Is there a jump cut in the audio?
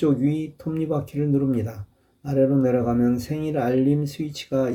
no; 0 cuts

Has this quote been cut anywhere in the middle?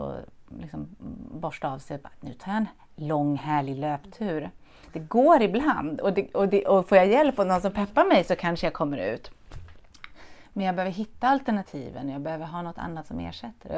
no; 0 cuts

